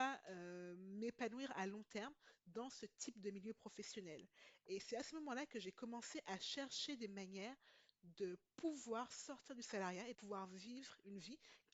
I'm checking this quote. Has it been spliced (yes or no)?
yes